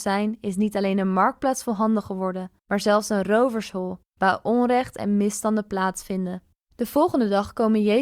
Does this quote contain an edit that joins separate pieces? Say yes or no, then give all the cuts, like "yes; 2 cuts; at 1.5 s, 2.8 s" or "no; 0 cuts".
yes; 3 cuts; at 2.6 s, 4.1 s, 6.6 s